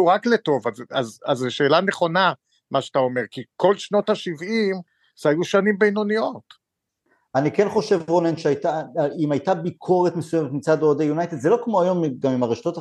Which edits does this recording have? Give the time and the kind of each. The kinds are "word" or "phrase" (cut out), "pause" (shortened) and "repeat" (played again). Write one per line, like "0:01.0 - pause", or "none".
none